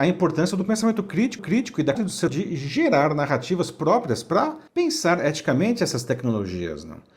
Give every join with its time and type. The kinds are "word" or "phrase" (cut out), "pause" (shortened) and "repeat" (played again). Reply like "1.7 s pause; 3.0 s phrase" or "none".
1.4 s repeat; 1.9 s word; 2.3 s word; 4.7 s pause